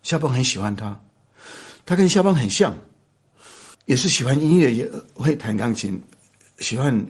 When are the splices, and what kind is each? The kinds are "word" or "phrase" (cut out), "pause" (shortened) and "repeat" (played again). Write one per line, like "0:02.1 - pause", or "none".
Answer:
0:03.7 - pause